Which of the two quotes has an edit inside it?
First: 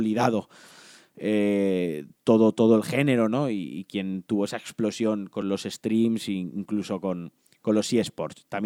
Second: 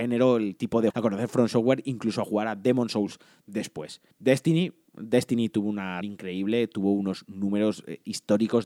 second; 3 cuts; at 0.9 s, 4.1 s, 6.0 s

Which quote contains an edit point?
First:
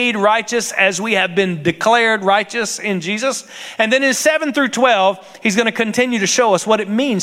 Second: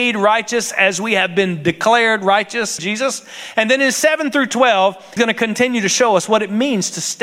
second; 2 cuts; at 2.8 s, 5.2 s

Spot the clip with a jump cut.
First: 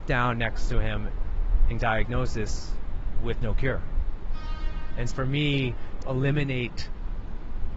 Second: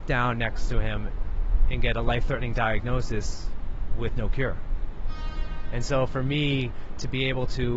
first; 3 cuts; at 1.7 s, 5.1 s, 6.0 s

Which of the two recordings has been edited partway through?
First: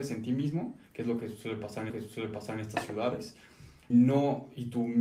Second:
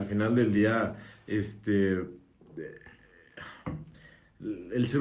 first; 2 cuts; at 1.9 s, 3.9 s

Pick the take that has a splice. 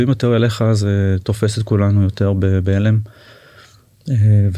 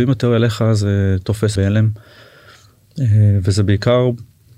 second; 1 cut; at 1.6 s

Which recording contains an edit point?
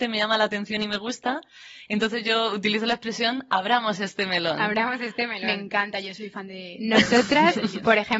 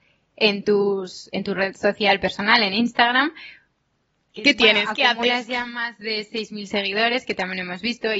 second; 1 cut; at 1.3 s

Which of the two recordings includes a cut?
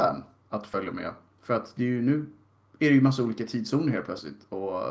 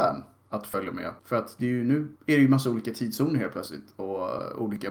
second; 2 cuts; at 1.2 s, 2.2 s

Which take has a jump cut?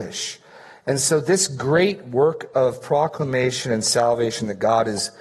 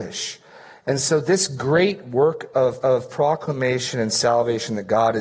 second; 1 cut; at 2.8 s

